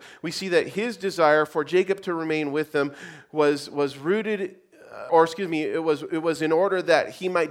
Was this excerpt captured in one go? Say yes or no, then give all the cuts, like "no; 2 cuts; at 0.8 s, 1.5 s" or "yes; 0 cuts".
no; 1 cut; at 5.1 s